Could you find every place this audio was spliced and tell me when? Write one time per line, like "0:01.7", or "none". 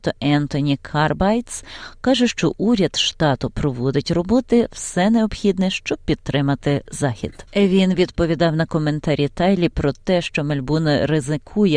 0:07.5